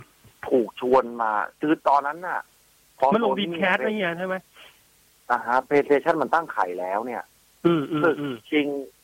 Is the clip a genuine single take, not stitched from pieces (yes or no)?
yes